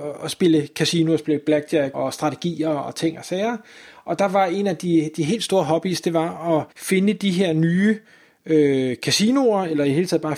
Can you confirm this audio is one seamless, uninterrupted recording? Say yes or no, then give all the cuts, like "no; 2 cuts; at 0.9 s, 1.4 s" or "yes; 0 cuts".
no; 2 cuts; at 1.9 s, 6.7 s